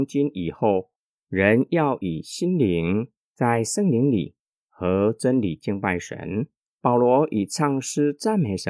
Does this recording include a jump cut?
no; 0 cuts

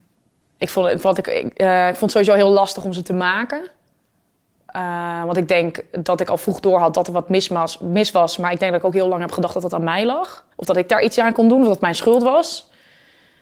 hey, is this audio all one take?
no; 1 cut; at 10.5 s

